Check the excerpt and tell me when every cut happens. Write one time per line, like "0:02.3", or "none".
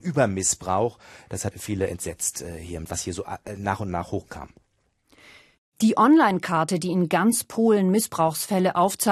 0:01.5
0:02.8

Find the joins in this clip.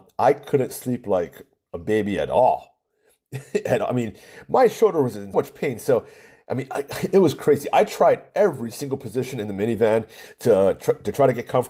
0:05.3

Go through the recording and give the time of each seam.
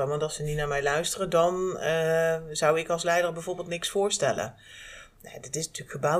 none

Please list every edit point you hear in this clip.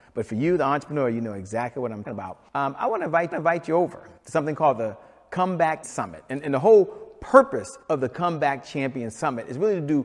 0:02.0
0:02.5
0:03.3
0:04.2
0:05.8
0:07.8

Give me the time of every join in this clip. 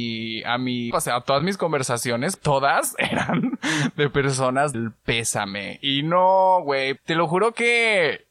0:00.9
0:02.4
0:04.7
0:07.0

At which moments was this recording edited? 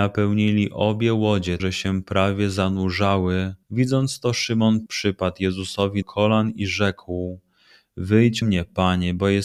0:01.6
0:03.6
0:04.9
0:06.0
0:08.4

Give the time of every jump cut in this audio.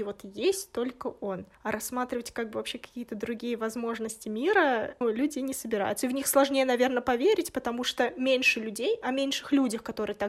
0:01.5
0:05.0

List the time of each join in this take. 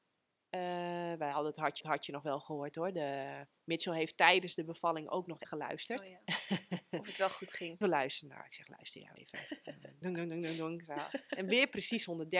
0:01.8
0:03.5
0:05.4
0:07.8
0:09.2
0:10.0

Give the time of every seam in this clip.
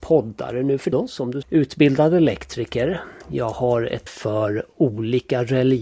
0:00.9
0:01.4
0:04.1

